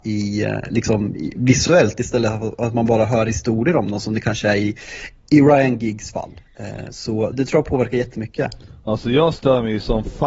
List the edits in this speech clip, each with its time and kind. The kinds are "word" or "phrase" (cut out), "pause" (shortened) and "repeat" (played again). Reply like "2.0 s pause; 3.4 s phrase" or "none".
7.3 s word